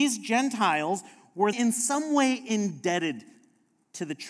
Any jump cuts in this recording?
yes; 1 cut; at 1.5 s

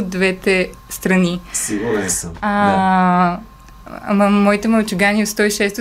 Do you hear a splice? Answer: no; 0 cuts

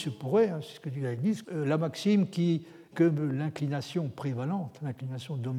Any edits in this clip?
yes; 2 cuts; at 1.4 s, 2.9 s

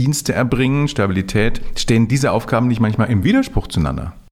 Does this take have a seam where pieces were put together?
no; 0 cuts

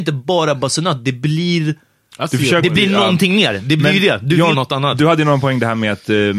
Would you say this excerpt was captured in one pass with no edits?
no; 1 cut; at 4.5 s

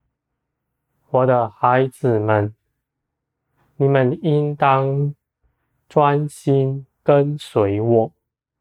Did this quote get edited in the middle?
no; 0 cuts

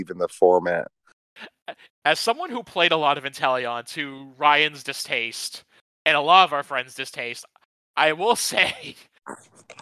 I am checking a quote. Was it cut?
no; 0 cuts

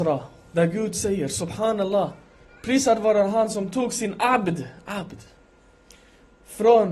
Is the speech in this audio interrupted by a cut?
no; 0 cuts

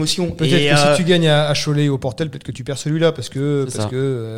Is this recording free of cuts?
yes; 0 cuts

